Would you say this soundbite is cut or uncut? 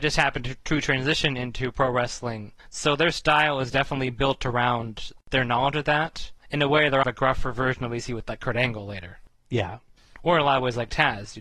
cut